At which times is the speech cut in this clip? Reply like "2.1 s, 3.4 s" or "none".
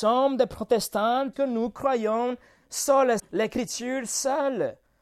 1.3 s, 3.2 s